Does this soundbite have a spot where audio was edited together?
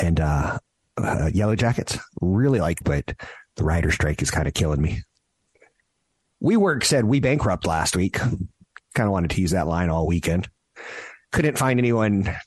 yes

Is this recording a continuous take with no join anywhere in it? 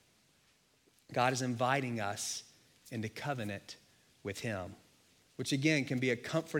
yes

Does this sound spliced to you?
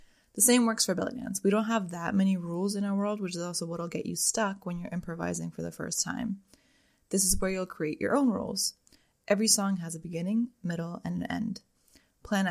no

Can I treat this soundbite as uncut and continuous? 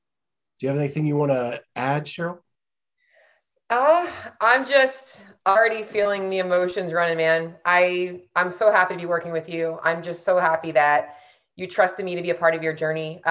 yes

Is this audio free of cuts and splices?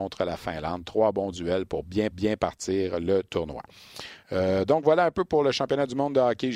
no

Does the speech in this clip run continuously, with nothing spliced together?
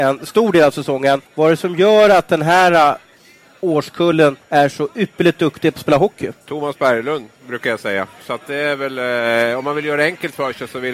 no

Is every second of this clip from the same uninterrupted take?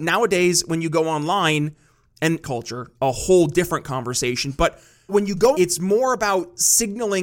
no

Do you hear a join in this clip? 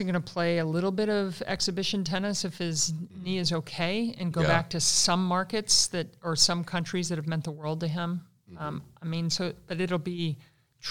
no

